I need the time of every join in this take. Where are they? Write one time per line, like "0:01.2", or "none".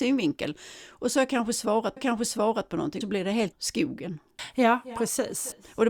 0:02.0
0:03.0
0:03.5